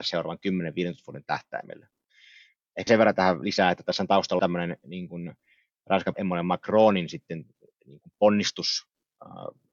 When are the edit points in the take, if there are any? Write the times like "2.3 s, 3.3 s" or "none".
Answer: 2.9 s, 4.4 s, 6.1 s